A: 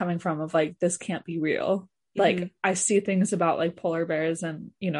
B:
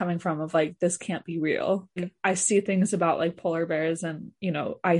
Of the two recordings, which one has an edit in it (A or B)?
B